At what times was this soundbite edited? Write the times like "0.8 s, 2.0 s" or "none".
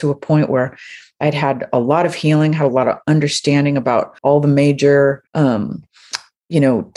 4.2 s, 5.3 s

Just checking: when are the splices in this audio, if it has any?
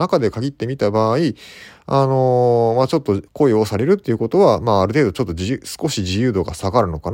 3.3 s

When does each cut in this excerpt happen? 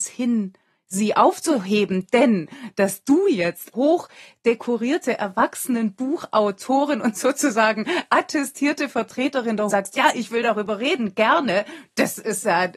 3.7 s, 9.7 s

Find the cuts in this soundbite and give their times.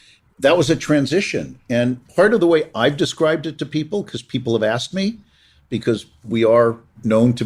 none

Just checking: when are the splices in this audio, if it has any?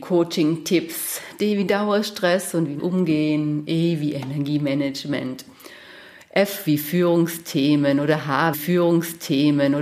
2.8 s, 8.5 s

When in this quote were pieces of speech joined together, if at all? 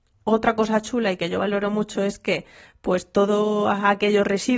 none

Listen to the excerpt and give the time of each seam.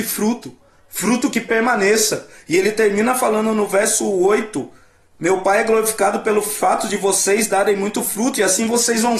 none

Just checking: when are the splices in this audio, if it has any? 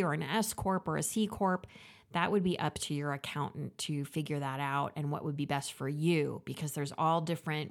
none

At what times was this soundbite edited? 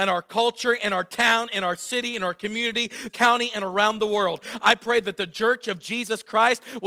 3.1 s

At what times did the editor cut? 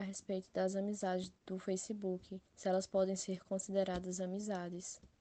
2.5 s

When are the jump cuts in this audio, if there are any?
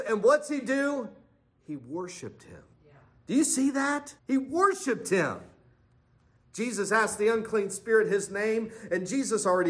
2.7 s, 4.2 s

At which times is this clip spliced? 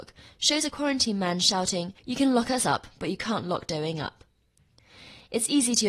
2.0 s

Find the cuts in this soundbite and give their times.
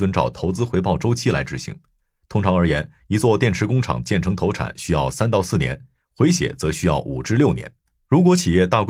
none

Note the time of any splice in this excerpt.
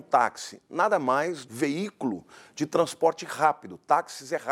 1.4 s

